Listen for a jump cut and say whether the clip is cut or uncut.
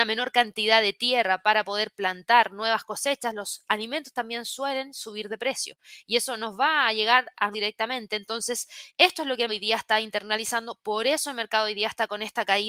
cut